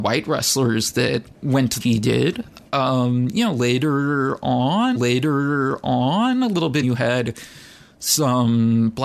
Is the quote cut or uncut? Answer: cut